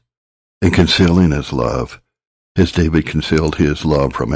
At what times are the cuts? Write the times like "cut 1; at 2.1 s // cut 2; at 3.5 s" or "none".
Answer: none

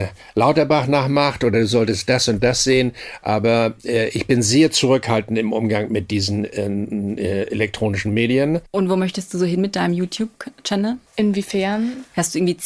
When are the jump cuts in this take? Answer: cut 1; at 11.1 s

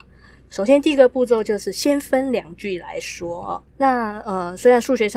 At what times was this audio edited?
cut 1; at 3.7 s

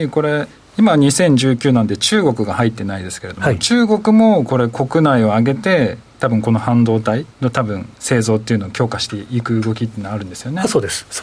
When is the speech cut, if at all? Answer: cut 1; at 7.3 s // cut 2; at 7.9 s

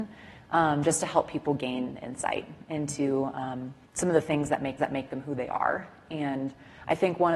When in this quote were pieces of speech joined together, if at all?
cut 1; at 3.9 s // cut 2; at 4.8 s

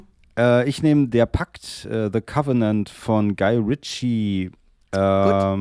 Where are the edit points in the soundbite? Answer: none

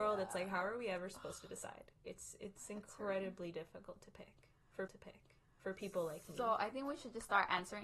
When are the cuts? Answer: cut 1; at 2.0 s // cut 2; at 4.9 s

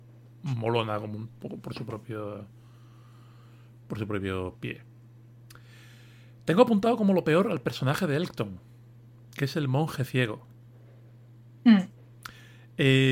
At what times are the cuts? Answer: none

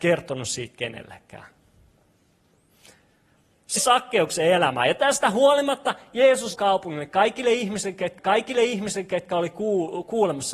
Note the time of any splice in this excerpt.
cut 1; at 3.8 s // cut 2; at 6.5 s // cut 3; at 8.2 s

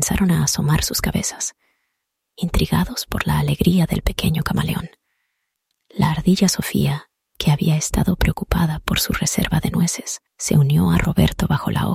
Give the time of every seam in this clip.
cut 1; at 10.3 s

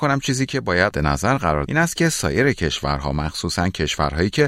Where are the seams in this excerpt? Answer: cut 1; at 0.9 s // cut 2; at 1.7 s

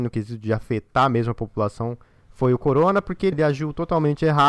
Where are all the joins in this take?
cut 1; at 3.3 s

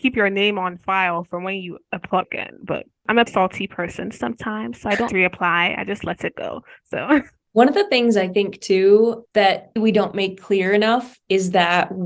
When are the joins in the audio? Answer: cut 1; at 2.2 s // cut 2; at 3.3 s // cut 3; at 5.1 s // cut 4; at 9.8 s

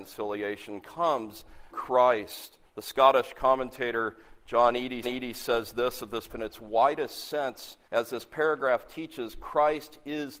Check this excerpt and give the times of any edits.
cut 1; at 1.7 s // cut 2; at 2.7 s // cut 3; at 5.0 s // cut 4; at 6.3 s // cut 5; at 7.9 s

